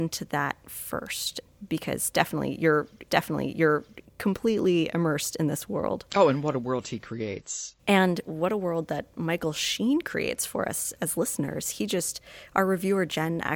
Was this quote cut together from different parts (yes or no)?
yes